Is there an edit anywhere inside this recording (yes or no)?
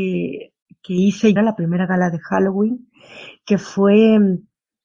yes